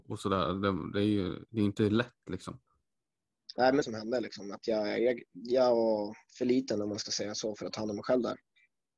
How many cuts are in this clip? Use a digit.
1